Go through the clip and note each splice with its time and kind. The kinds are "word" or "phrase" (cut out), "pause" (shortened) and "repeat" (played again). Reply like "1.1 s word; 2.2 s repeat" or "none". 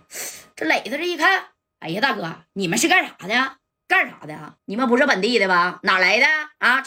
3.7 s pause; 4.6 s pause